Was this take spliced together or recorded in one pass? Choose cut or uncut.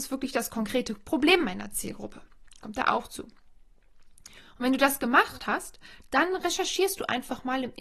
uncut